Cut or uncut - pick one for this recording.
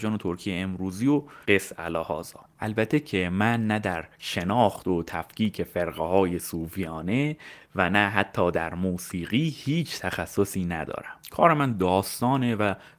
cut